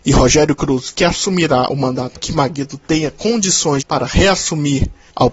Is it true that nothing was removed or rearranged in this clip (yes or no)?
no